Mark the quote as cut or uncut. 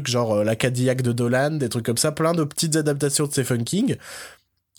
uncut